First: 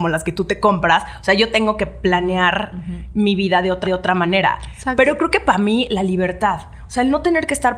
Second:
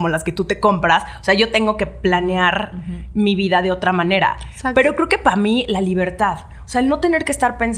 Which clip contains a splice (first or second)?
first